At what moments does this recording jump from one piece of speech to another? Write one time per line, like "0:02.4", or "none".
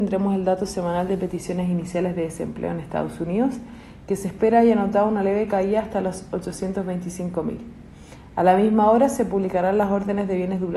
none